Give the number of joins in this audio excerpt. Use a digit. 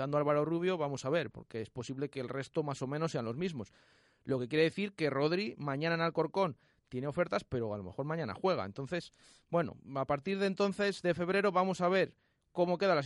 0